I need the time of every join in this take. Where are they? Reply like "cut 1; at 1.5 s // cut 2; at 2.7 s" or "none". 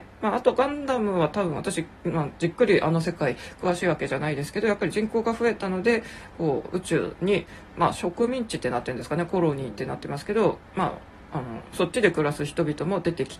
none